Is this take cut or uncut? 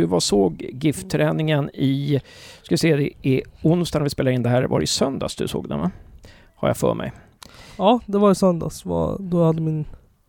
uncut